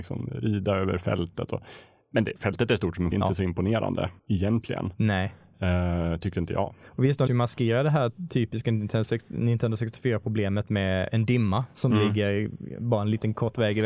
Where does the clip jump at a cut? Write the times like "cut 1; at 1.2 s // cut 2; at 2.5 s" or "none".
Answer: cut 1; at 3.1 s // cut 2; at 4.2 s // cut 3; at 7.3 s // cut 4; at 11.1 s